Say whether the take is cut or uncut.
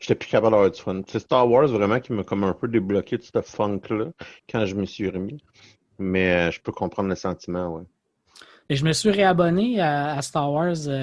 uncut